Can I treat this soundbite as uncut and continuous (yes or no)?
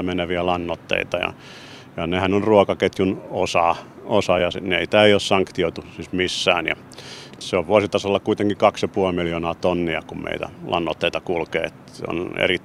yes